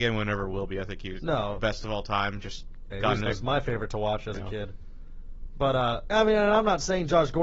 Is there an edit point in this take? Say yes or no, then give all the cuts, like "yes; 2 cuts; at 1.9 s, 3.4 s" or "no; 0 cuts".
yes; 4 cuts; at 1.6 s, 2.9 s, 3.3 s, 6.1 s